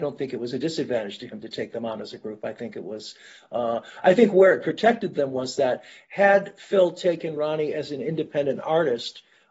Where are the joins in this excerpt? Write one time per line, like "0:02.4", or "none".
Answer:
none